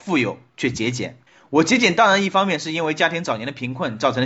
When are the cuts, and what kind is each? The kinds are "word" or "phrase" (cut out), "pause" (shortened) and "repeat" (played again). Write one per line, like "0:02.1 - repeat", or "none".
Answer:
0:01.3 - pause

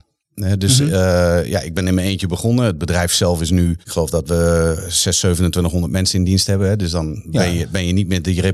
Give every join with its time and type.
0:03.8 - pause

